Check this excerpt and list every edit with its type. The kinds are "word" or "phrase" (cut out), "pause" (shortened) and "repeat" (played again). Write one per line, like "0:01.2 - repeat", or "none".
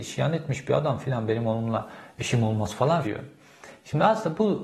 0:03.0 - word